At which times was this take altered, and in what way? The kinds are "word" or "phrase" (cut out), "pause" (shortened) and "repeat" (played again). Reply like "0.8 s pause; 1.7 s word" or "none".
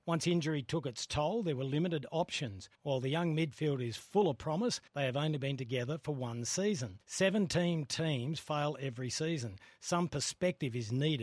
2.7 s pause; 4.9 s pause; 7.0 s pause